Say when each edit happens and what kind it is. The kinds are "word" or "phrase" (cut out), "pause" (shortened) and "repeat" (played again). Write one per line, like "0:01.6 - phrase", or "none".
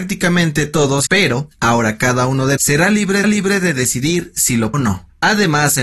0:01.1 - word
0:02.6 - word
0:03.2 - repeat
0:04.7 - word